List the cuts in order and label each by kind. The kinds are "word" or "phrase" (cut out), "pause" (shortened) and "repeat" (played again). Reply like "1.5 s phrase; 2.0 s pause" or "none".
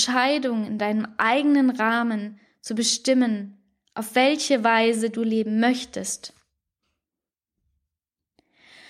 none